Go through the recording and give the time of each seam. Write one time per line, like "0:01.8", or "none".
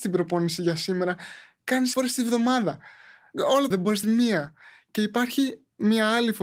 0:01.9
0:03.7
0:04.0